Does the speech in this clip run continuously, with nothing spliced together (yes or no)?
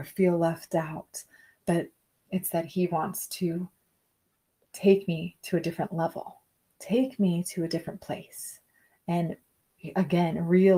yes